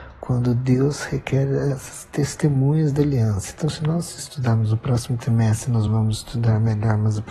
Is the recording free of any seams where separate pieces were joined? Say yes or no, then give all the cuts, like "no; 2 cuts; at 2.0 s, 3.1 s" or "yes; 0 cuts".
yes; 0 cuts